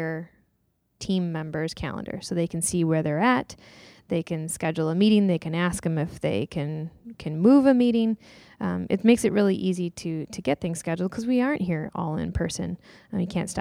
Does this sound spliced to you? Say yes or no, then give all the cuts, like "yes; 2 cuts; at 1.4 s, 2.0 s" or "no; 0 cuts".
no; 0 cuts